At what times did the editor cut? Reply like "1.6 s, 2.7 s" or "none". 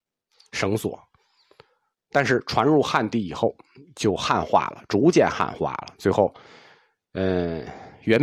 none